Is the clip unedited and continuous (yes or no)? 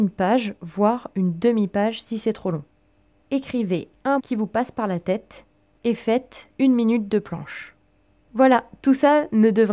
no